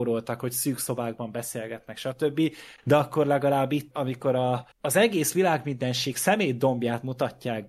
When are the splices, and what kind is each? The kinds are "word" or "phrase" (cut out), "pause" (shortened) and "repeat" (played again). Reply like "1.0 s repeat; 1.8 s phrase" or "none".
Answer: 3.9 s word; 4.7 s pause